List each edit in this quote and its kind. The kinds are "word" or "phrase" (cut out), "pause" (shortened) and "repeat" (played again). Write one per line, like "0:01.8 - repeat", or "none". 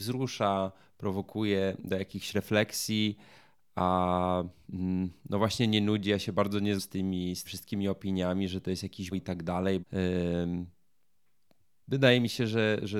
0:06.8 - word
0:07.4 - word
0:09.1 - word
0:09.8 - word